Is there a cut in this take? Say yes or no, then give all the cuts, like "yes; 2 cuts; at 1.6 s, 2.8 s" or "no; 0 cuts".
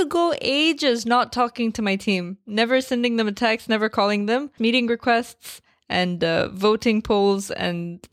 yes; 1 cut; at 4.6 s